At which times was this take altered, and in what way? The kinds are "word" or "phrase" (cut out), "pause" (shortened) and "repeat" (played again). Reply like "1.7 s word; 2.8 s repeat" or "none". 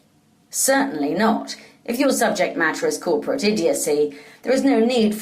none